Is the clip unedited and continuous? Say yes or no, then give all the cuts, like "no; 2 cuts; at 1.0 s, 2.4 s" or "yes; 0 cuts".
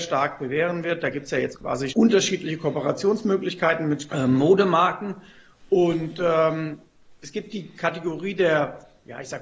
no; 3 cuts; at 1.5 s, 1.9 s, 4.1 s